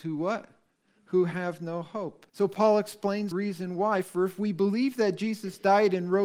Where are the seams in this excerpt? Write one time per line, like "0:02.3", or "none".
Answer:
0:02.3
0:03.3